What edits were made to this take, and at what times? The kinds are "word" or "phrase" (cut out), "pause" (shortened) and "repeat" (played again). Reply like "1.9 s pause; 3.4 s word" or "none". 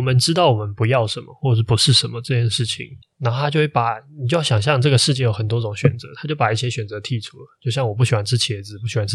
3.0 s pause